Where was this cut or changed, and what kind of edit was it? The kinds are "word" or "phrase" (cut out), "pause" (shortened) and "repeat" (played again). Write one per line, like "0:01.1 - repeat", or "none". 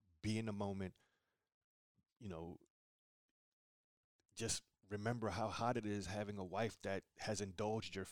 none

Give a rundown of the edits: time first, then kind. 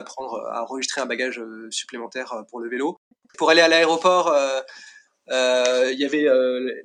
none

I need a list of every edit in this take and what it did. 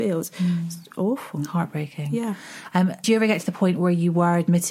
0:03.0 - word

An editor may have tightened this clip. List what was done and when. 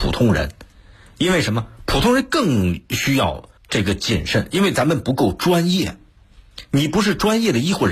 0:03.6 - pause

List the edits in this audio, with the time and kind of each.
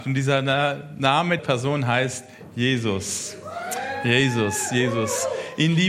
0:01.4 - word

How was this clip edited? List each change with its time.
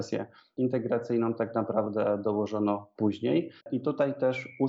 0:03.6 - pause

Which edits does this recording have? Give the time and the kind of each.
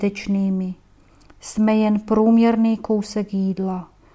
none

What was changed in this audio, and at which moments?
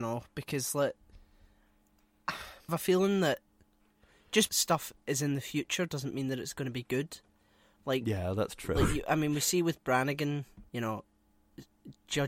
0:02.7 - word
0:04.5 - word
0:10.7 - word

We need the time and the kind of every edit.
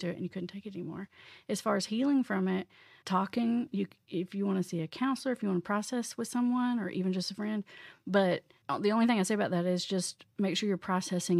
none

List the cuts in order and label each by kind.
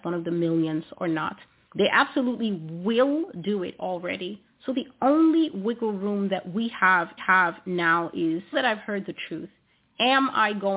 0:07.2 - repeat
0:08.5 - word

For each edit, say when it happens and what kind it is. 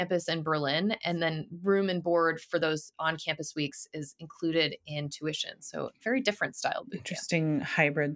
none

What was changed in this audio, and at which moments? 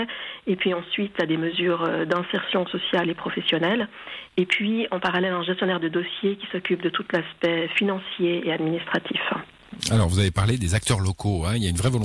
none

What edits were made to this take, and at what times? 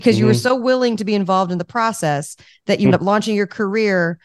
0:02.9 - word

